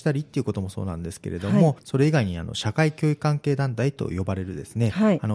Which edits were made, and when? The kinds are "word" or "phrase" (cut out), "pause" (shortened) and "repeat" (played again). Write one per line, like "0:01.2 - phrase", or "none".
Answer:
0:01.8 - pause

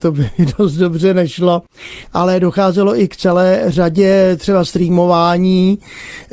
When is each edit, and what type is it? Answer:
none

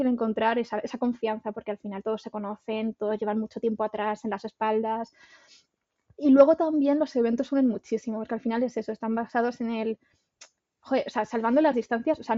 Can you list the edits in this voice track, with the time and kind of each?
none

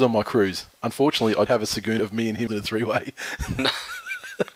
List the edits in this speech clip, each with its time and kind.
0:01.5 - word
0:02.0 - word
0:02.5 - word

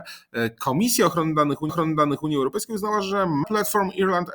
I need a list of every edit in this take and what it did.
0:01.7 - repeat
0:03.4 - word

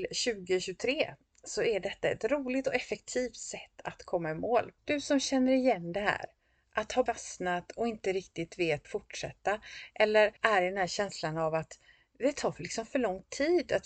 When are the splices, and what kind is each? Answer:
0:04.8 - pause
0:07.1 - word
0:08.8 - phrase
0:10.4 - pause

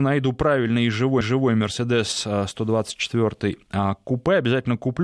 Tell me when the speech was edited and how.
0:01.2 - repeat

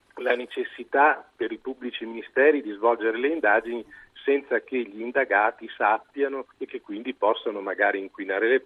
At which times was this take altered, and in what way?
0:06.5 - pause

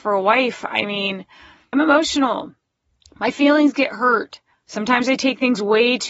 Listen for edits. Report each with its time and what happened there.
0:01.7 - word
0:04.5 - pause

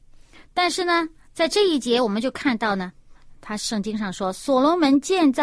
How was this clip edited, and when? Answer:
0:03.3 - word

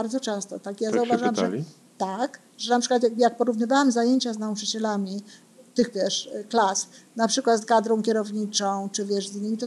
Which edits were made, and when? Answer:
0:05.9 - word
0:07.6 - word

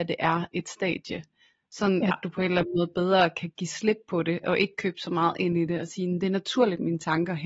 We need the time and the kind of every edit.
none

